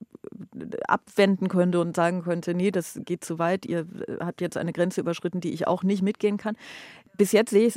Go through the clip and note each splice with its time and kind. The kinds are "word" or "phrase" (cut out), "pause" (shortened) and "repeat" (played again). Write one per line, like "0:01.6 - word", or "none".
none